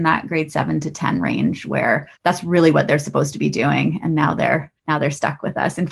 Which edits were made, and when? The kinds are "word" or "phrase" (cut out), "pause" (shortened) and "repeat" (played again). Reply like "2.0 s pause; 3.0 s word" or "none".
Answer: 2.2 s pause; 4.8 s pause